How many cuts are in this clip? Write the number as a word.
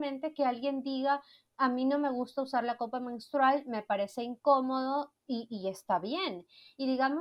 zero